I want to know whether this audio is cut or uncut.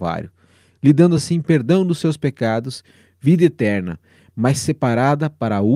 uncut